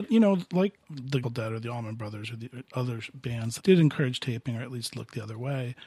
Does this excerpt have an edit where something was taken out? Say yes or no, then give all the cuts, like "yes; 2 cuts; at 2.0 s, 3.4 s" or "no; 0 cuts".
yes; 2 cuts; at 1.2 s, 3.6 s